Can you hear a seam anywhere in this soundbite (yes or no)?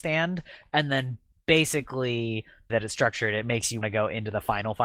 yes